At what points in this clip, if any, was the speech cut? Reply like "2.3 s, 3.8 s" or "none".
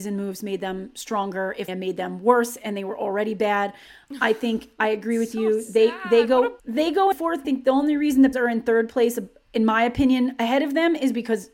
1.7 s, 6.6 s, 7.1 s, 7.4 s, 8.3 s